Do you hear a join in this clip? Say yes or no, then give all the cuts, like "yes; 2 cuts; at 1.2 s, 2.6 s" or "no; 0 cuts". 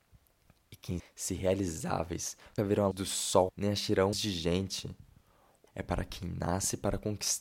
yes; 6 cuts; at 1.0 s, 2.6 s, 2.9 s, 3.5 s, 4.1 s, 5.7 s